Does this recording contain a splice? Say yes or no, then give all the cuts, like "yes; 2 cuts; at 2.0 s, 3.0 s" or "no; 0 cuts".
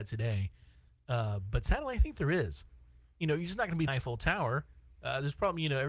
yes; 1 cut; at 3.9 s